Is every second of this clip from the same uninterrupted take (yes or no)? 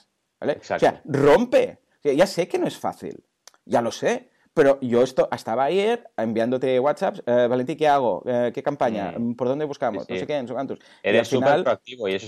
yes